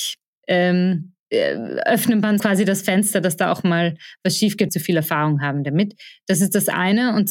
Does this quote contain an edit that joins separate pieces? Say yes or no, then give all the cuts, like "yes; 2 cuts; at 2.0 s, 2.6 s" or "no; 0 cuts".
yes; 3 cuts; at 1.2 s, 2.4 s, 4.7 s